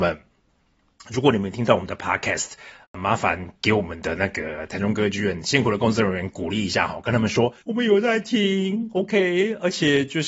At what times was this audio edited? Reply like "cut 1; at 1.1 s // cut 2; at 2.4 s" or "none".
cut 1; at 7.6 s